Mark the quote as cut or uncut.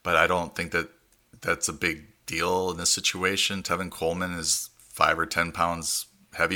uncut